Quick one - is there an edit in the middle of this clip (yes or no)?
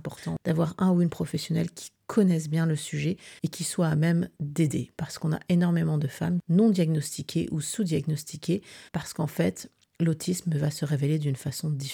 yes